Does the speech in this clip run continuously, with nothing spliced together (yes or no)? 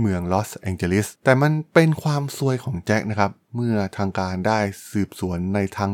no